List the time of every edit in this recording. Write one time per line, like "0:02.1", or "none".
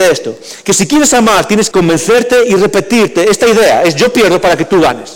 0:01.7